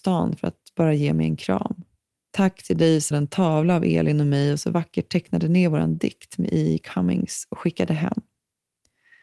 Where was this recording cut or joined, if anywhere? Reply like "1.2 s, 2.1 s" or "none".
2.1 s, 3.1 s